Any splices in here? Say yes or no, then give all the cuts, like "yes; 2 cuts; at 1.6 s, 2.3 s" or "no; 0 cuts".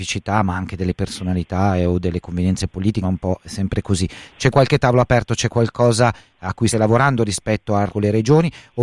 yes; 3 cuts; at 3.0 s, 6.7 s, 7.9 s